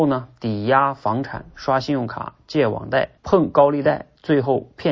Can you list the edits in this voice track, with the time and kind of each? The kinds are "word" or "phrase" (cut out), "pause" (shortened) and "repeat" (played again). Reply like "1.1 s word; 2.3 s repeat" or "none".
3.2 s pause